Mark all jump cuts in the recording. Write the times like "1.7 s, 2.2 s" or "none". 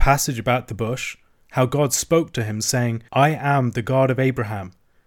3.1 s